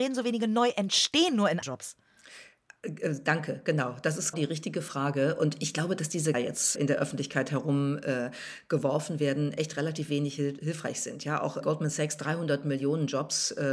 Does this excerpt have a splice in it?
yes; 5 cuts; at 1.6 s, 4.3 s, 6.3 s, 6.8 s, 11.6 s

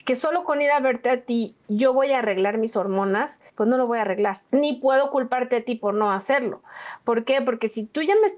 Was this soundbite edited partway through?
yes; 2 cuts; at 3.5 s, 4.5 s

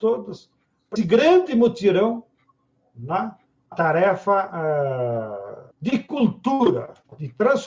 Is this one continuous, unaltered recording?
no; 3 cuts; at 1.0 s, 3.7 s, 5.7 s

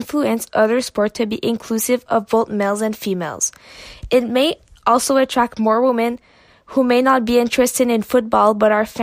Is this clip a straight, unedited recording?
yes; 0 cuts

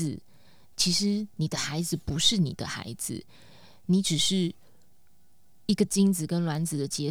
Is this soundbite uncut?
yes; 0 cuts

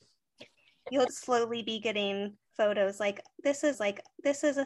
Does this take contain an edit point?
yes; 3 cuts; at 1.1 s, 2.5 s, 3.7 s

